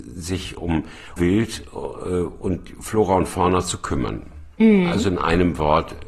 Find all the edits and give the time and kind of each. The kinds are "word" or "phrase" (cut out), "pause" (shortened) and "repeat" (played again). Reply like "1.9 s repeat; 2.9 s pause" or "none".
1.2 s word